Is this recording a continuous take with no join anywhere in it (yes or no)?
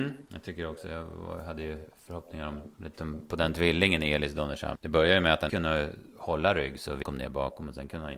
no